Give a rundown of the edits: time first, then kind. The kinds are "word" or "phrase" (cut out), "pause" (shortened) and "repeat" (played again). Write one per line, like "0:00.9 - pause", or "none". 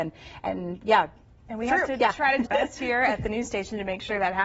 0:02.4 - word